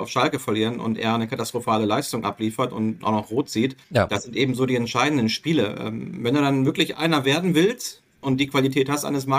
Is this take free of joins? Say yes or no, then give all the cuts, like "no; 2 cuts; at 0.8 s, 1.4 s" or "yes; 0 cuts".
no; 2 cuts; at 3.8 s, 8.2 s